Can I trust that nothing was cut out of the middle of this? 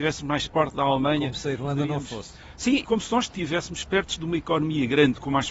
no; 2 cuts; at 2.8 s, 3.3 s

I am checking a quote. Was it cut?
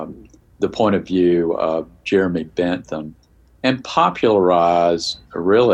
no; 0 cuts

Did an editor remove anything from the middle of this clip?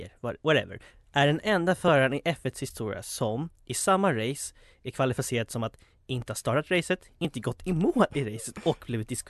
no; 0 cuts

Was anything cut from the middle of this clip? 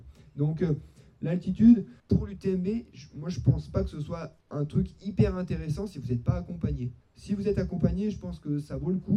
yes; 3 cuts; at 2.0 s, 4.4 s, 7.0 s

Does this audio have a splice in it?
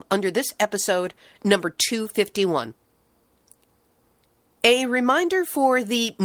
no; 0 cuts

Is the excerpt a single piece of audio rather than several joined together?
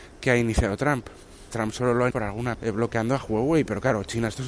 no; 3 cuts; at 1.5 s, 2.1 s, 2.5 s

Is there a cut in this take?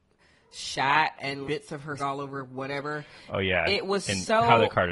yes; 2 cuts; at 1.4 s, 2.0 s

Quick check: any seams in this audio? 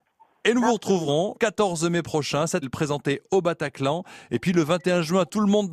yes; 2 cuts; at 1.3 s, 2.6 s

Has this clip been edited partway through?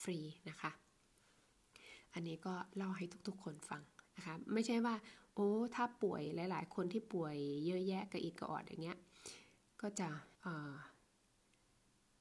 yes; 1 cut; at 10.3 s

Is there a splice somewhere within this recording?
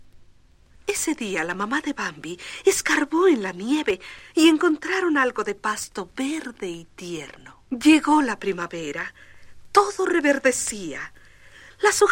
no; 0 cuts

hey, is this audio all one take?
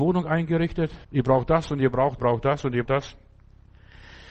no; 3 cuts; at 1.0 s, 2.2 s, 2.9 s

